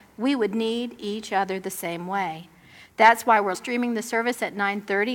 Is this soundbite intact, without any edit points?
no; 1 cut; at 3.5 s

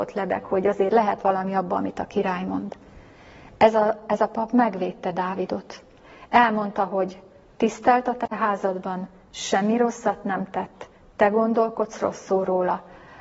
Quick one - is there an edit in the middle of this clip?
no; 0 cuts

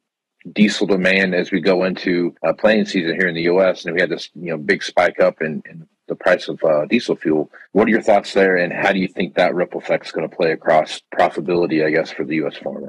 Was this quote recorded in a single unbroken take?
no; 3 cuts; at 2.4 s, 7.7 s, 11.0 s

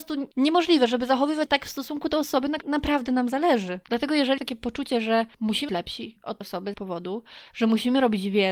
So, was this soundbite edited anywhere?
yes; 6 cuts; at 1.5 s, 2.6 s, 4.4 s, 5.7 s, 6.4 s, 6.7 s

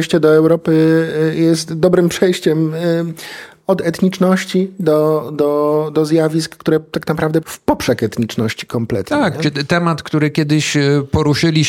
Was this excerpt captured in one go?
no; 1 cut; at 7.4 s

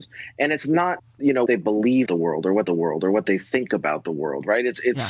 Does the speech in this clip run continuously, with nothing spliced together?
no; 4 cuts; at 1.0 s, 1.5 s, 2.1 s, 2.7 s

